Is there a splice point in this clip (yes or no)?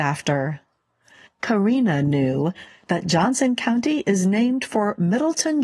no